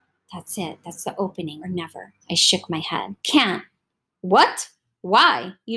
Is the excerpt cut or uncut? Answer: cut